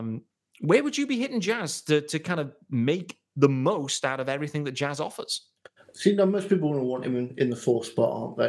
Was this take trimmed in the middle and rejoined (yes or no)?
no